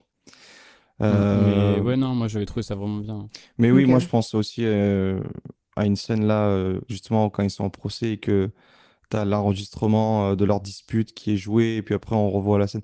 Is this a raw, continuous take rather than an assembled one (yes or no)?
yes